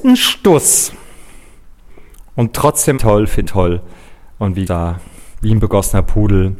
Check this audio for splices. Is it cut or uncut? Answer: cut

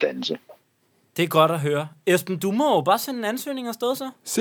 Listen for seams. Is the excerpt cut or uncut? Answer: uncut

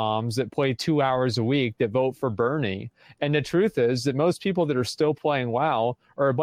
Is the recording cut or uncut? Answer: uncut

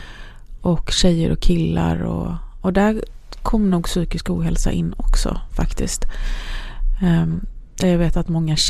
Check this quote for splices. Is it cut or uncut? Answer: uncut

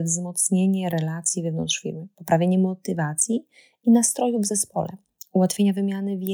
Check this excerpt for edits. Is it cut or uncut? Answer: uncut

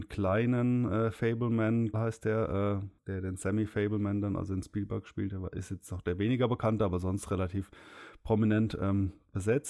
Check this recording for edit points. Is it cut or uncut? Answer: cut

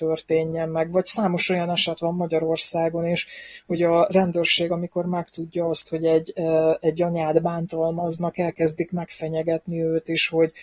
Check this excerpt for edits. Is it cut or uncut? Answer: uncut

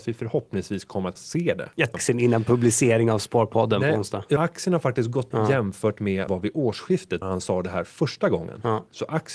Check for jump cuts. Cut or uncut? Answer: cut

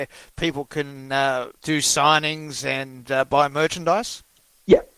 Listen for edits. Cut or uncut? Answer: cut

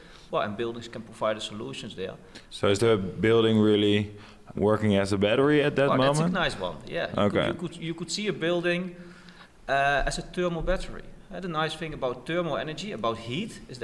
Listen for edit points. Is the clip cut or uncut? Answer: cut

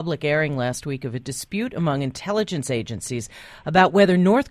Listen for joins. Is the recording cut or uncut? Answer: uncut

